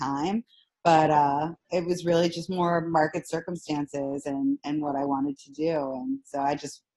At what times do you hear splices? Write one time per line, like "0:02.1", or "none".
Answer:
none